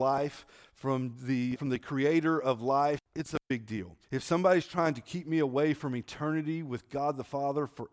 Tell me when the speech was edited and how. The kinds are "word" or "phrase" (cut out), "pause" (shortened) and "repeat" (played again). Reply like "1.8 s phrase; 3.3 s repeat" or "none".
1.6 s word; 3.1 s pause; 4.0 s pause